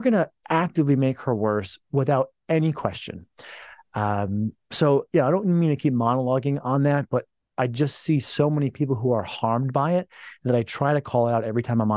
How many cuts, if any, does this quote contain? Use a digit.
0